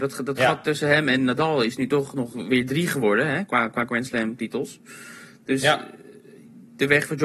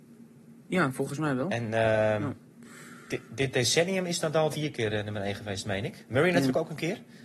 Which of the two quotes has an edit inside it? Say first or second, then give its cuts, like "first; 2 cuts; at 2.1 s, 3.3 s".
second; 1 cut; at 4.5 s